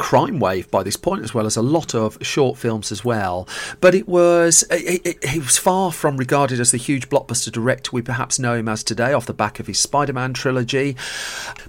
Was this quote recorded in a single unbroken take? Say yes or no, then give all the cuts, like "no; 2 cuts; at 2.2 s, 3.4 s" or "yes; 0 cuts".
yes; 0 cuts